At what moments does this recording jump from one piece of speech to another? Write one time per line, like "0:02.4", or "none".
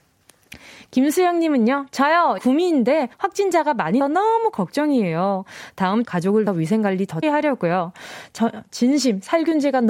0:02.4
0:03.1
0:04.0
0:06.0
0:06.5
0:07.2